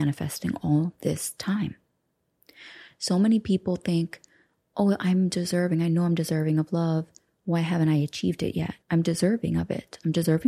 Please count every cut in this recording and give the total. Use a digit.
1